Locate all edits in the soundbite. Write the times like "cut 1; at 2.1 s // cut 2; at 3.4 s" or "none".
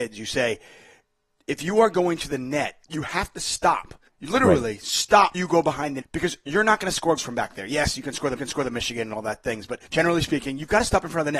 cut 1; at 2.8 s // cut 2; at 4.1 s // cut 3; at 5.3 s // cut 4; at 6.0 s // cut 5; at 7.2 s // cut 6; at 8.4 s // cut 7; at 9.9 s